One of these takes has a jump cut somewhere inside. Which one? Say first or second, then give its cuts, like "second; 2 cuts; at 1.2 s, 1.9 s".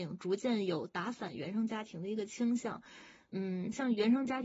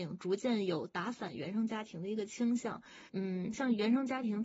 second; 1 cut; at 3.1 s